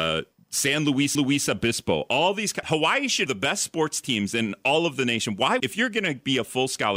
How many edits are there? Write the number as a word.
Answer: four